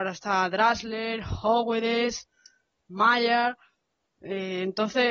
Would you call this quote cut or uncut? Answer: uncut